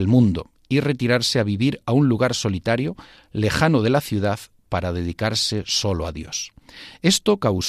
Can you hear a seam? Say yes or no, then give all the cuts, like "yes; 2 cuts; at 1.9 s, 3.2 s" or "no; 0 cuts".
no; 0 cuts